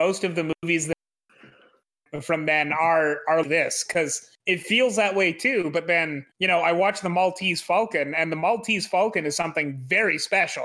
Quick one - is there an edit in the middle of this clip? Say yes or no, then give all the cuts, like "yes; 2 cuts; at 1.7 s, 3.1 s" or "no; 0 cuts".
yes; 3 cuts; at 3.4 s, 4.4 s, 6.3 s